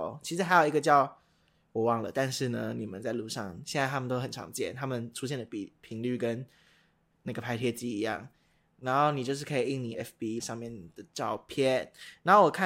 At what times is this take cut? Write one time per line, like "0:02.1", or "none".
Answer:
0:09.9
0:10.4